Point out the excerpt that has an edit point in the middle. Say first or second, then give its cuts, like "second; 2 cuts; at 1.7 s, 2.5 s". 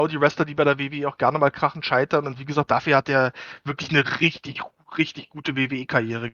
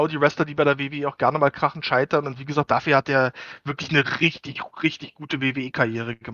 second; 1 cut; at 4.7 s